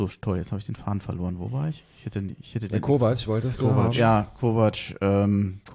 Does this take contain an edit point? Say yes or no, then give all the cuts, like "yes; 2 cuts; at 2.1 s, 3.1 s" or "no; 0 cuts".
no; 0 cuts